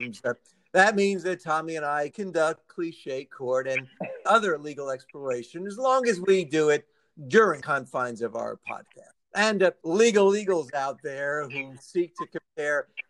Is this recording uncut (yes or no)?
no